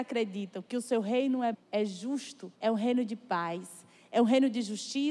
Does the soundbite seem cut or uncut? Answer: cut